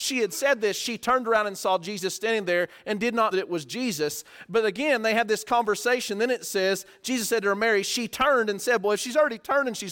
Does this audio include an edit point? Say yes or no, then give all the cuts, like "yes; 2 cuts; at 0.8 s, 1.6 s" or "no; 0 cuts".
yes; 1 cut; at 3.3 s